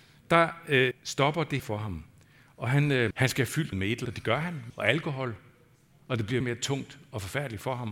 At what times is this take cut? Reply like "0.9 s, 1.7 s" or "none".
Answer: 0.9 s, 1.6 s, 3.1 s, 3.7 s, 4.0 s, 4.7 s, 6.4 s